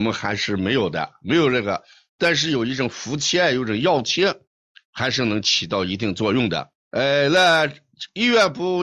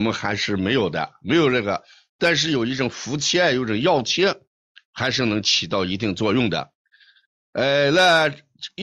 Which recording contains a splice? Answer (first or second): first